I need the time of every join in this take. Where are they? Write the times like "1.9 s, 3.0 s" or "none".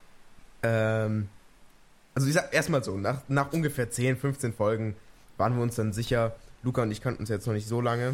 none